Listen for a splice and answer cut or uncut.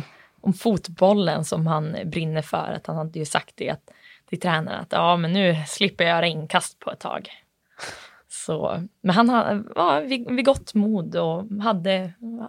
uncut